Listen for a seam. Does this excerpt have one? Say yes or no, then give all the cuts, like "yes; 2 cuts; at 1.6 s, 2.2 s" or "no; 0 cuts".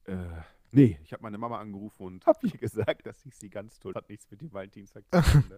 yes; 2 cuts; at 2.2 s, 3.9 s